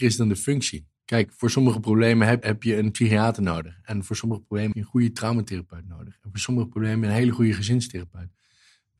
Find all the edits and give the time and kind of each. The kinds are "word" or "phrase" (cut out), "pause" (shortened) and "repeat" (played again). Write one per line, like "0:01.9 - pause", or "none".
0:01.0 - pause
0:02.4 - word
0:04.7 - word